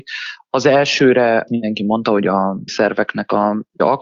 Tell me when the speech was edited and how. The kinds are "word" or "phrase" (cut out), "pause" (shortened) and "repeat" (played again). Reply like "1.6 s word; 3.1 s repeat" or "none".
1.5 s word; 2.7 s word